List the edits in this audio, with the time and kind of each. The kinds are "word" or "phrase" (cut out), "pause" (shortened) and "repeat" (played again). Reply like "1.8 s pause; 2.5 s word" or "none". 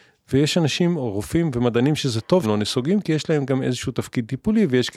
2.0 s word; 2.4 s word